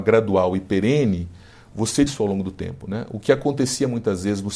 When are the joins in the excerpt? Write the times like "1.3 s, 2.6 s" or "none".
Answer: 2.1 s